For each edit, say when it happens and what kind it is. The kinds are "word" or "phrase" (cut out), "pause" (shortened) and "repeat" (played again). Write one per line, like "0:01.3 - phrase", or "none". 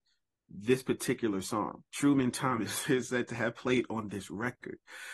0:01.9 - pause

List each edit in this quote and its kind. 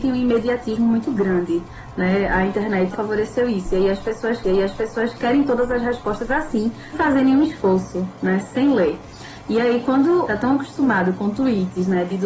0:02.9 - word
0:04.4 - repeat
0:06.9 - word
0:10.3 - phrase

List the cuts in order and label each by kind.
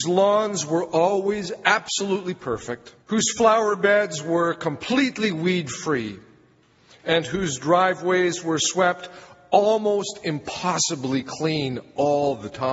0:03.0 - pause

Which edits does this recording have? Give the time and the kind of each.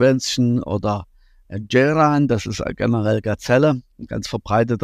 none

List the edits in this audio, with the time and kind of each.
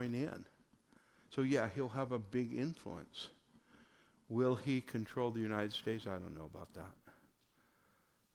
none

